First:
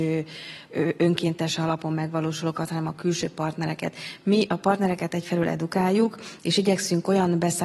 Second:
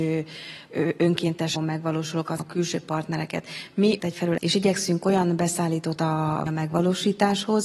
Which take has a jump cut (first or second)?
second